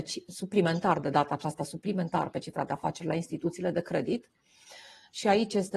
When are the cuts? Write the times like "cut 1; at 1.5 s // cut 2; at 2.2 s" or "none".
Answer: none